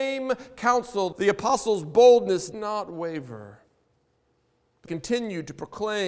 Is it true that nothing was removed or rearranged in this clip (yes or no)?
no